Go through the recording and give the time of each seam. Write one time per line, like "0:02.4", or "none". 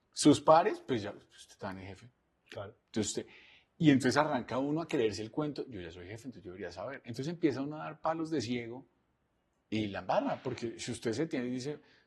none